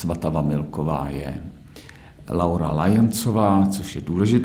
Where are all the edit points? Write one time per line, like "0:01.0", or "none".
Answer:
none